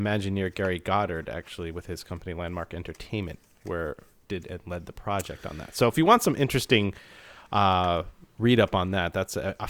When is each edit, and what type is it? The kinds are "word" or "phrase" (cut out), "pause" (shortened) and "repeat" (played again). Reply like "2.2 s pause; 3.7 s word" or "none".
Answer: none